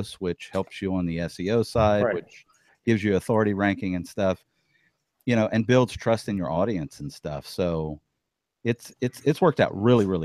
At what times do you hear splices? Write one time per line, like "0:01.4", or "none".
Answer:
none